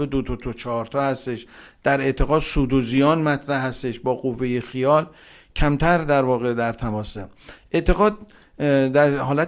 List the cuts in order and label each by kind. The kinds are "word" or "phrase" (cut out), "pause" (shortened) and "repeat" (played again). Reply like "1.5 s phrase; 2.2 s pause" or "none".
none